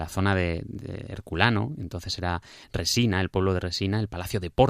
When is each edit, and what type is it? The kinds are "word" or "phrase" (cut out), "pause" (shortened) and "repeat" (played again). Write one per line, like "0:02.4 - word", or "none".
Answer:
none